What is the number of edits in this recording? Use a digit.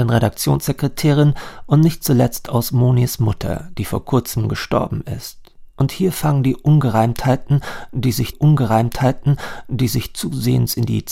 1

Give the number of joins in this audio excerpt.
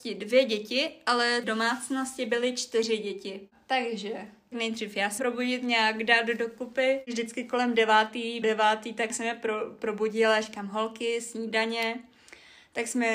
5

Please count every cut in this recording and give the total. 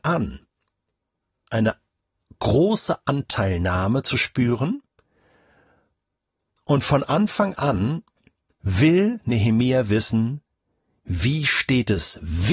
0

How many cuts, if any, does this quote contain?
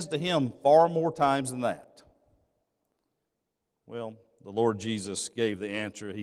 0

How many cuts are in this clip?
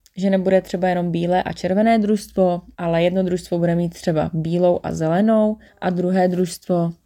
2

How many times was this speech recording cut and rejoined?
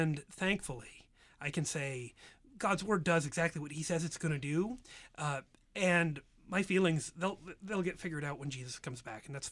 0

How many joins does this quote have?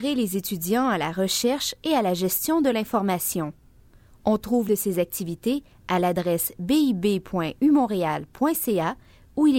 1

